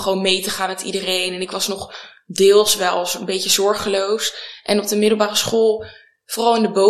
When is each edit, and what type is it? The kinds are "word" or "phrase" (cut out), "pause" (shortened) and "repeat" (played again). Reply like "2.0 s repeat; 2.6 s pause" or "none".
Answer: none